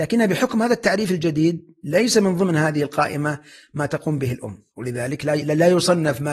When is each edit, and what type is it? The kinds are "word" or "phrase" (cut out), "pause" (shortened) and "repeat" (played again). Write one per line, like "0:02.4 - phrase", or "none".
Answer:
0:04.7 - pause